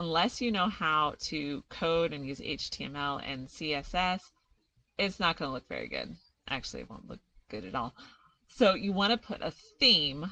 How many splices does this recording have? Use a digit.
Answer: 0